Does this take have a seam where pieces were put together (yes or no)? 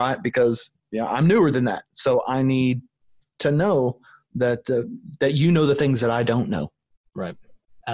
no